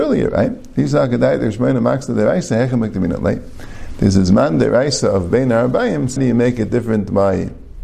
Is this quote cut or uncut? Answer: cut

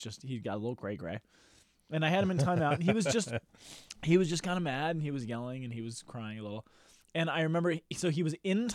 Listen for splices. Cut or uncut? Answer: uncut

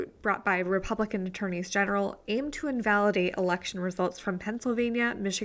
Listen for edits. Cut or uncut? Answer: uncut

